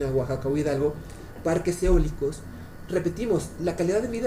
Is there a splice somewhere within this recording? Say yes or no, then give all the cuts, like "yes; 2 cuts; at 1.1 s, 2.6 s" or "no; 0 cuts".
yes; 2 cuts; at 1.4 s, 2.9 s